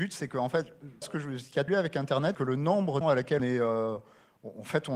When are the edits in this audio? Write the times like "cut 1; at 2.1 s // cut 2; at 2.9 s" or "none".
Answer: cut 1; at 1.0 s // cut 2; at 1.7 s // cut 3; at 2.3 s // cut 4; at 3.0 s // cut 5; at 3.4 s